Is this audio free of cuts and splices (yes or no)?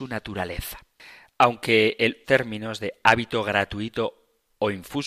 no